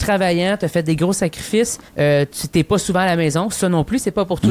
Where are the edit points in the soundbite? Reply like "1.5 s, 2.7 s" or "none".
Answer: 1.9 s

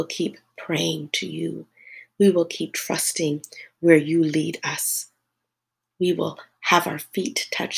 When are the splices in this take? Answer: none

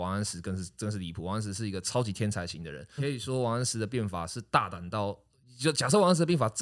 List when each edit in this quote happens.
3.0 s

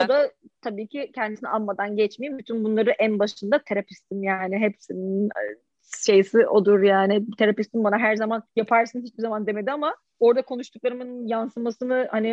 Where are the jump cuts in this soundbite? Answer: 8.5 s

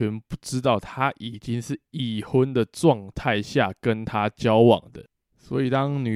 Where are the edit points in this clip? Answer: none

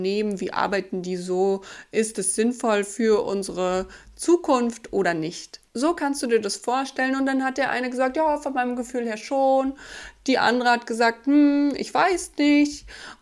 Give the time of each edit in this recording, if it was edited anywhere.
none

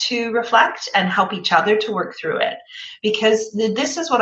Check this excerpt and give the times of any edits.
none

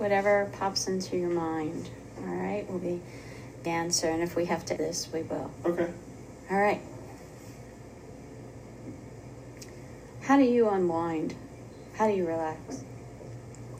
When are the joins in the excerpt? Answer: 2.8 s, 3.7 s, 4.8 s

